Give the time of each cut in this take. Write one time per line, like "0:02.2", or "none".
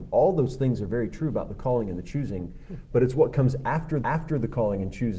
0:04.0